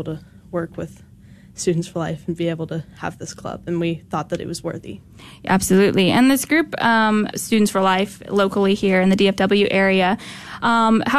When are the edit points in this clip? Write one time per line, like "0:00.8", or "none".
0:07.3

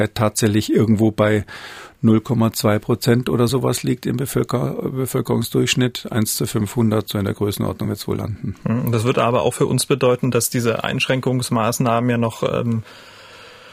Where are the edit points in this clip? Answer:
none

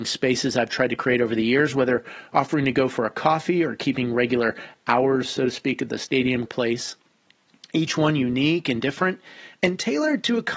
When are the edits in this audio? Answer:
0:06.5

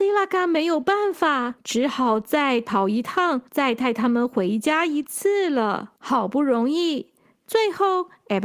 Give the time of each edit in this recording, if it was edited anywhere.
0:01.6
0:03.5
0:06.0

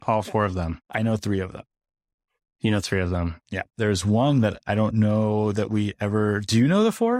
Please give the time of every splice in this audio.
0:03.4

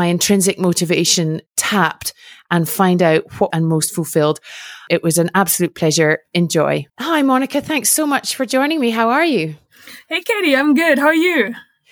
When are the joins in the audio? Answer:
0:01.5
0:03.5
0:06.9

